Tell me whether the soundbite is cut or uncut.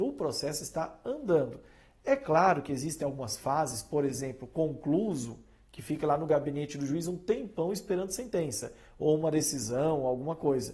uncut